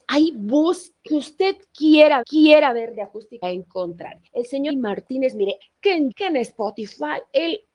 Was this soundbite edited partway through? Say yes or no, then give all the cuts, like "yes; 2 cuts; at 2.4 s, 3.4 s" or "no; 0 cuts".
yes; 7 cuts; at 1.1 s, 2.2 s, 3.4 s, 4.3 s, 4.7 s, 5.6 s, 6.1 s